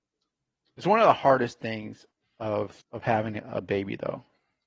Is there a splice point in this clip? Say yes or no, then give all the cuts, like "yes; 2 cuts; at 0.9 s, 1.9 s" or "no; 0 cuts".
yes; 1 cut; at 2.8 s